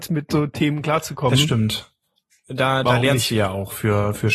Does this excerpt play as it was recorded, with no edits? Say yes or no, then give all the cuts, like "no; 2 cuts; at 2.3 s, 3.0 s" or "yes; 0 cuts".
yes; 0 cuts